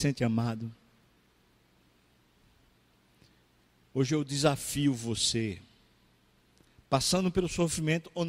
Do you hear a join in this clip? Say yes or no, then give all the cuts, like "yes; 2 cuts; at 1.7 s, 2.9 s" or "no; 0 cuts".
no; 0 cuts